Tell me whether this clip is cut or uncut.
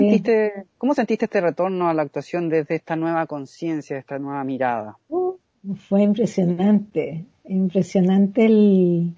uncut